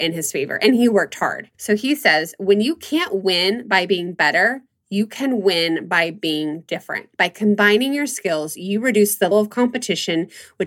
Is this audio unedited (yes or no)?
no